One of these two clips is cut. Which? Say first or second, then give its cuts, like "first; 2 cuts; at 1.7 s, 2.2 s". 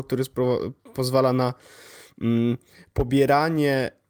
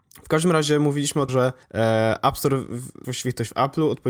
second; 3 cuts; at 1.3 s, 1.6 s, 3.0 s